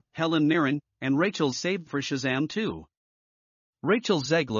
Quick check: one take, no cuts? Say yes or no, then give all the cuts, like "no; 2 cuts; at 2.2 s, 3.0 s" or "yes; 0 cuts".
no; 2 cuts; at 1.5 s, 1.9 s